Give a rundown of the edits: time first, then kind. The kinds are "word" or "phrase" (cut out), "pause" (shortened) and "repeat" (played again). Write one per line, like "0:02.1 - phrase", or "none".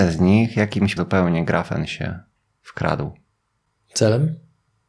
0:01.0 - word